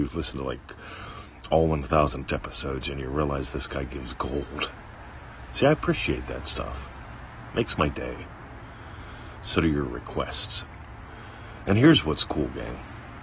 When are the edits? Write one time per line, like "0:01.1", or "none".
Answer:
0:02.3